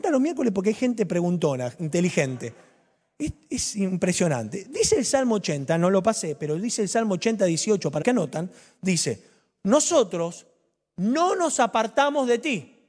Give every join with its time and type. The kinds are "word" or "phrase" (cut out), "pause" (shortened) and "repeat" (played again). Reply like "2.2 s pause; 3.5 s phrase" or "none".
8.0 s word